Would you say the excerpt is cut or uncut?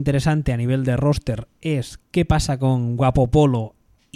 uncut